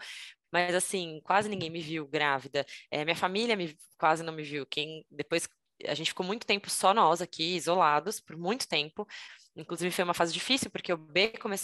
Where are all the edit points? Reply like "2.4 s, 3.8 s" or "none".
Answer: none